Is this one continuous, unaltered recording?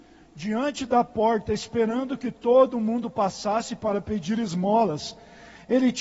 yes; 0 cuts

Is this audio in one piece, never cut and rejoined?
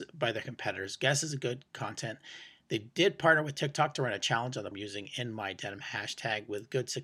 no; 1 cut; at 4.7 s

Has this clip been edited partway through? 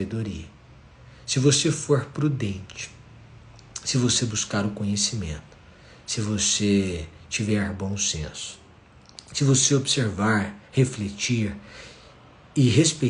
no; 0 cuts

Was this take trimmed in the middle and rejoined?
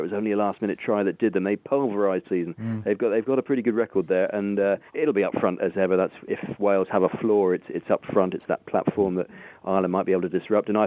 yes; 3 cuts; at 2.2 s, 4.9 s, 5.6 s

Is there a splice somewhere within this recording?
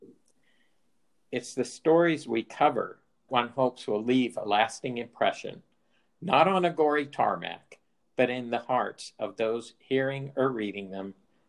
yes; 1 cut; at 3.3 s

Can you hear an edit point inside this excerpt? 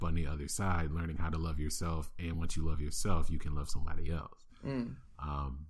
no; 0 cuts

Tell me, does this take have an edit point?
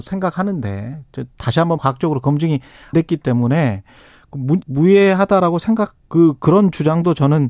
yes; 3 cuts; at 1.8 s, 2.9 s, 4.6 s

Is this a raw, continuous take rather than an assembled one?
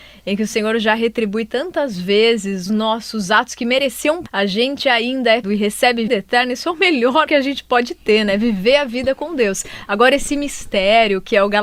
no; 5 cuts; at 2.7 s, 4.3 s, 5.4 s, 6.1 s, 7.3 s

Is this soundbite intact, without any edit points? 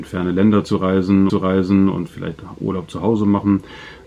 no; 1 cut; at 1.3 s

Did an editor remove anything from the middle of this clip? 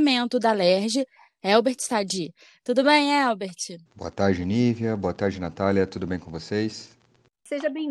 yes; 1 cut; at 3.9 s

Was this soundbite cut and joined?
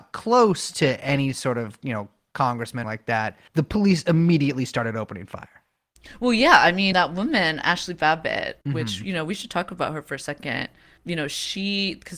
yes; 5 cuts; at 2.8 s, 3.5 s, 6.9 s, 8.6 s, 11.0 s

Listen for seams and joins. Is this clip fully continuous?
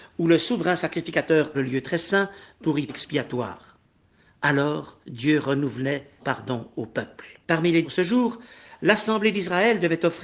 no; 6 cuts; at 1.5 s, 2.9 s, 5.0 s, 6.2 s, 7.4 s, 7.8 s

